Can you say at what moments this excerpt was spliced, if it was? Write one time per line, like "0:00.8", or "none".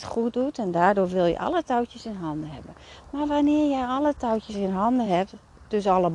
none